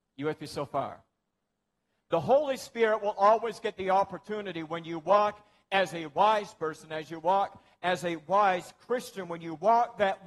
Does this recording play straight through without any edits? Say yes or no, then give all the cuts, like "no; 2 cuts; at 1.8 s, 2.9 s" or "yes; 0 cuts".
yes; 0 cuts